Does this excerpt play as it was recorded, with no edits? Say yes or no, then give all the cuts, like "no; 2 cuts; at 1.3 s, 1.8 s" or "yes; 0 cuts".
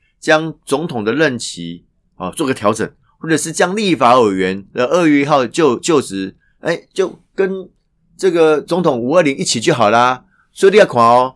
yes; 0 cuts